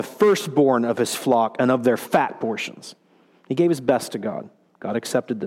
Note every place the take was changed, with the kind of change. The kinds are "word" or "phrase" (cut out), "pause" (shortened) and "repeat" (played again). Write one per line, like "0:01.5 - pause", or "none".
none